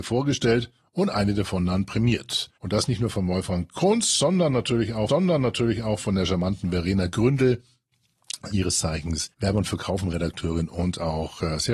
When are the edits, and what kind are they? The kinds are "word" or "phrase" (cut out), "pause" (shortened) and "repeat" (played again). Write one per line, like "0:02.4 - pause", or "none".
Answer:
0:02.6 - pause
0:05.1 - repeat
0:08.5 - word
0:09.3 - pause